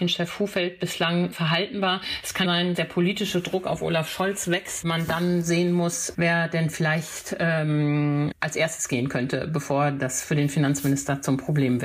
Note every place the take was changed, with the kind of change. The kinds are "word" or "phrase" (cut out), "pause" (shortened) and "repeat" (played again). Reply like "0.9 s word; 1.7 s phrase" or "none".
1.3 s word; 2.4 s word; 2.7 s word; 4.8 s word; 6.1 s word; 8.3 s word